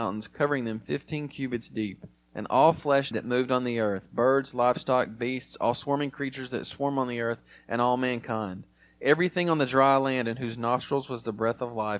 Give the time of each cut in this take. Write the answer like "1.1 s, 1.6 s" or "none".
2.1 s, 3.1 s